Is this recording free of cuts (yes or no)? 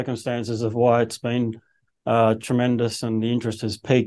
yes